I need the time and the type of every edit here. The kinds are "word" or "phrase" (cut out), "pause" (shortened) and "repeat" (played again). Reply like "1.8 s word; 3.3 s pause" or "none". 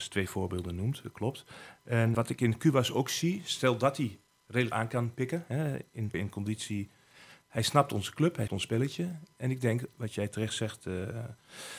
2.1 s word; 4.7 s word; 6.1 s word; 8.5 s word